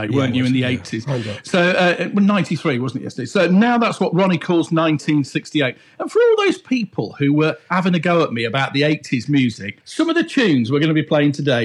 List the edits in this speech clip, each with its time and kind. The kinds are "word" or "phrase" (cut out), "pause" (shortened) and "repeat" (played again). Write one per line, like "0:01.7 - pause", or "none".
0:09.8 - pause